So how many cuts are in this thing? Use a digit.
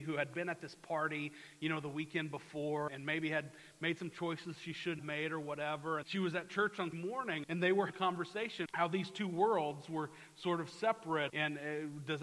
8